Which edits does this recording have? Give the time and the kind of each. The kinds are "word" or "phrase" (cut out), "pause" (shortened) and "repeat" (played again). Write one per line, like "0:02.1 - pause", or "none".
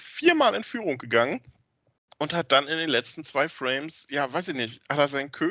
none